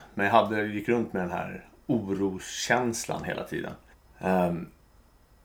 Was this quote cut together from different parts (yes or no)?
yes